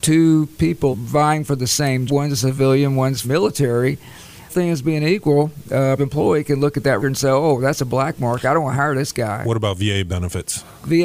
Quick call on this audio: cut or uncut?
cut